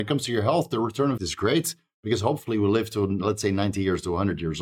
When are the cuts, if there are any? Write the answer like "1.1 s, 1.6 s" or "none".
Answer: 1.2 s